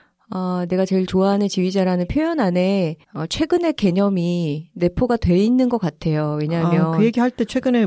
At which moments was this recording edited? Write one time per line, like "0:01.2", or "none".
0:03.0